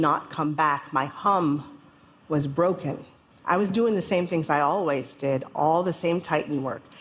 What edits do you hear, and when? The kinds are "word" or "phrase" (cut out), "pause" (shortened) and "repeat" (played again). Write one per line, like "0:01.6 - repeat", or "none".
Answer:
0:03.3 - pause